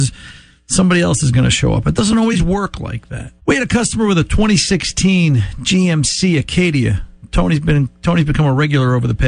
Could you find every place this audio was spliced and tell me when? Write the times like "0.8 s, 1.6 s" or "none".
3.4 s